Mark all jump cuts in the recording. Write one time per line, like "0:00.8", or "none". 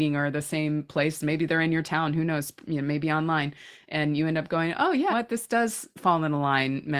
0:05.1